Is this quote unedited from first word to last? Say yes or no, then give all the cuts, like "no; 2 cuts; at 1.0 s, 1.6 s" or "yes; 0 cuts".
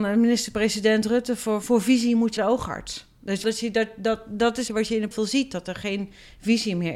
no; 5 cuts; at 1.6 s, 2.4 s, 3.4 s, 4.7 s, 5.1 s